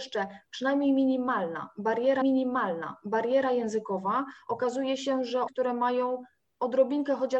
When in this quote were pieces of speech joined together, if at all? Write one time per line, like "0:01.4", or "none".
0:02.2
0:05.5